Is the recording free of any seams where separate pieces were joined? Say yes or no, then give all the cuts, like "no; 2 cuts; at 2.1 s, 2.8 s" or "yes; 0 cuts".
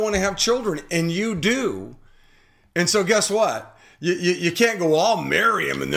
yes; 0 cuts